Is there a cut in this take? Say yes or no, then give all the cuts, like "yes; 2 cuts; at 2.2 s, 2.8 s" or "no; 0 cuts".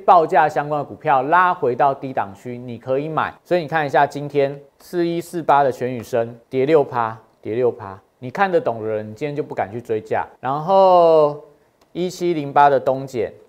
yes; 5 cuts; at 3.4 s, 4.7 s, 6.4 s, 8.1 s, 10.4 s